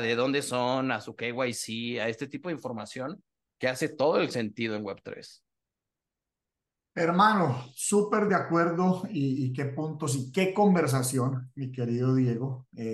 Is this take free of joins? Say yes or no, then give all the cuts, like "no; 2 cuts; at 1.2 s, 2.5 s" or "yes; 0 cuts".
yes; 0 cuts